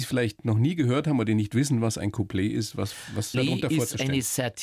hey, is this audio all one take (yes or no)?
no